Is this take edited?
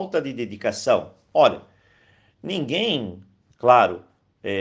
no; 0 cuts

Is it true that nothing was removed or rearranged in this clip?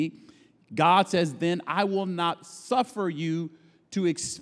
yes; 0 cuts

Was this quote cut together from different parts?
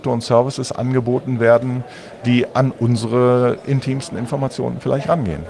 no; 0 cuts

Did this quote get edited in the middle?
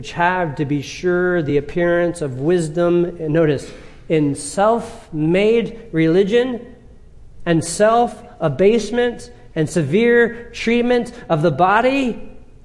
no; 0 cuts

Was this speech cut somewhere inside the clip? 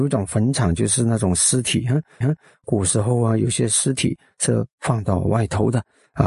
yes; 1 cut; at 2.2 s

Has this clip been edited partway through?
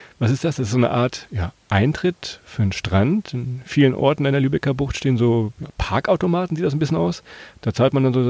no; 0 cuts

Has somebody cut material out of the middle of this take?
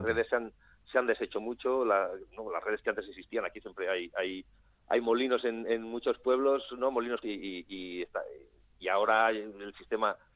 yes; 1 cut; at 7.2 s

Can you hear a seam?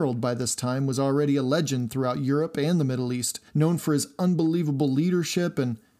yes; 1 cut; at 3.5 s

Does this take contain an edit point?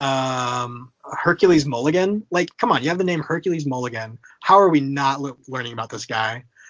yes; 1 cut; at 5.4 s

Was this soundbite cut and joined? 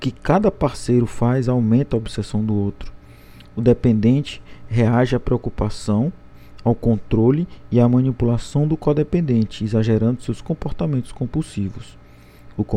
no; 0 cuts

